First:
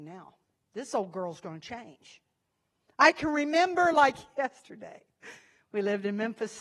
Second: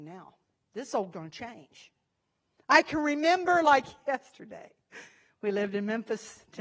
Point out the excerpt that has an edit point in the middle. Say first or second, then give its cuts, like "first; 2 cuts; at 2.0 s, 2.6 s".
second; 1 cut; at 1.1 s